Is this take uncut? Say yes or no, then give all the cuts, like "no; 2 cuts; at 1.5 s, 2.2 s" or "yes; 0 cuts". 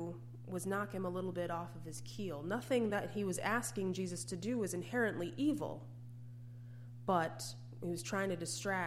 yes; 0 cuts